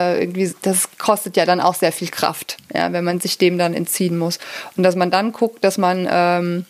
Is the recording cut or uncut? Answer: uncut